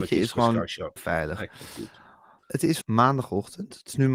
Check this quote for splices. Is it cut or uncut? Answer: cut